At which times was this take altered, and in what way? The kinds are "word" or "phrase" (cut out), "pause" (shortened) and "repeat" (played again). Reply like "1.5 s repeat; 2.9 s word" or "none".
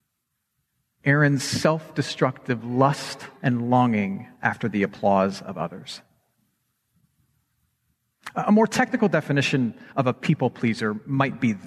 3.4 s pause; 4.3 s pause; 9.9 s pause